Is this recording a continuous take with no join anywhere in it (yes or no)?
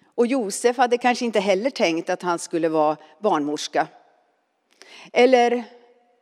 yes